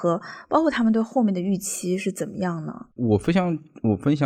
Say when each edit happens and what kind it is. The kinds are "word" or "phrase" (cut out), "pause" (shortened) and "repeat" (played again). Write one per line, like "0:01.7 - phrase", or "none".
0:02.9 - pause